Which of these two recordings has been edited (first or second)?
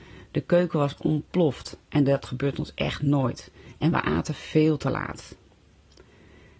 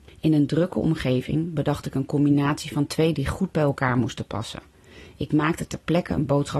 second